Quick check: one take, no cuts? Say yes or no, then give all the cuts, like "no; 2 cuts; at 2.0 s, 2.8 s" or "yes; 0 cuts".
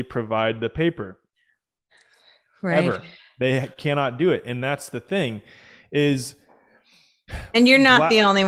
yes; 0 cuts